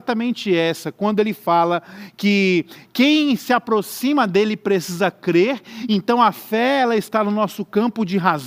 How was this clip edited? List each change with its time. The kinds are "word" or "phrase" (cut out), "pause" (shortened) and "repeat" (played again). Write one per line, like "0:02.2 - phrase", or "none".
none